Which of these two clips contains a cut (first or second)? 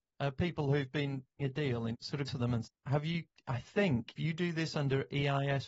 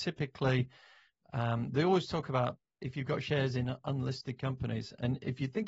first